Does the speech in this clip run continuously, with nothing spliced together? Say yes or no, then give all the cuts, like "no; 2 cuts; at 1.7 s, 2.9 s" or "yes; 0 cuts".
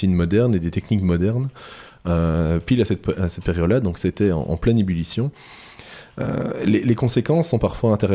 yes; 0 cuts